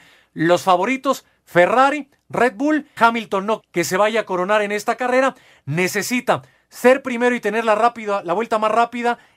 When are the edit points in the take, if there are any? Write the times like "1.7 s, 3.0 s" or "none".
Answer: 3.0 s, 3.6 s